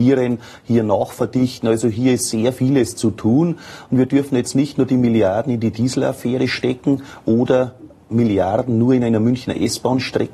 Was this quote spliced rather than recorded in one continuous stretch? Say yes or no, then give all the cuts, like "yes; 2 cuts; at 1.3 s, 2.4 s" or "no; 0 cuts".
no; 0 cuts